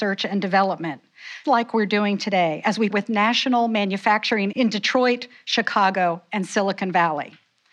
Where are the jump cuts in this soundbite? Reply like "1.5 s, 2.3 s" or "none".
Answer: 1.4 s, 2.9 s, 4.5 s